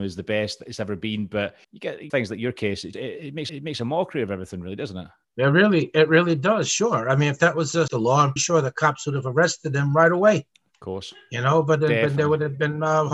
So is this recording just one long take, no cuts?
no; 7 cuts; at 1.6 s, 2.1 s, 2.9 s, 3.5 s, 5.2 s, 7.9 s, 8.4 s

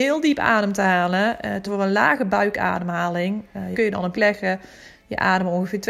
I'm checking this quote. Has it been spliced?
yes; 3 cuts; at 1.6 s, 3.7 s, 4.1 s

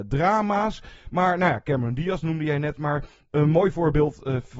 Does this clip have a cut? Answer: no; 0 cuts

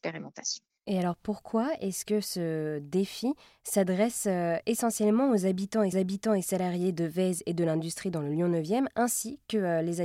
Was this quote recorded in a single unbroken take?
no; 1 cut; at 5.9 s

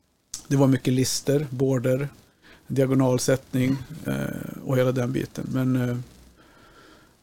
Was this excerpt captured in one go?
yes; 0 cuts

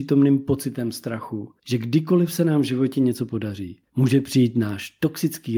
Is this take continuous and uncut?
no; 2 cuts; at 1.6 s, 3.9 s

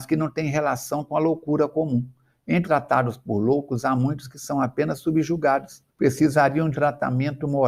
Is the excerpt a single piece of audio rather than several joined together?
no; 3 cuts; at 2.6 s, 5.9 s, 6.7 s

